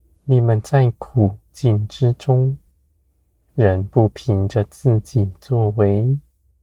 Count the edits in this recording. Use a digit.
0